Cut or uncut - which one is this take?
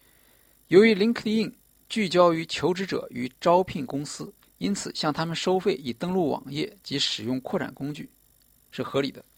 cut